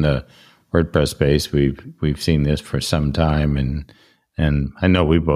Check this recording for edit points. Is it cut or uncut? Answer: uncut